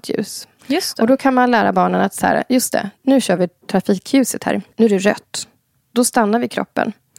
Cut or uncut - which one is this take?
cut